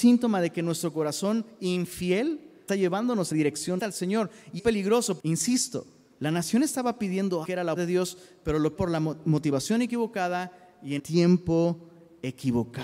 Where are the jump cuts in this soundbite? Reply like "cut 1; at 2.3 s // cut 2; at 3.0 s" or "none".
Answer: cut 1; at 2.7 s // cut 2; at 3.3 s // cut 3; at 3.8 s // cut 4; at 4.6 s // cut 5; at 5.2 s // cut 6; at 7.4 s // cut 7; at 7.8 s // cut 8; at 8.8 s // cut 9; at 11.0 s